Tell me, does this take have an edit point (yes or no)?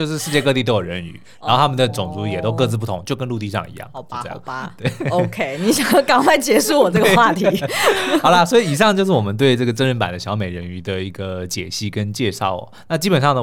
no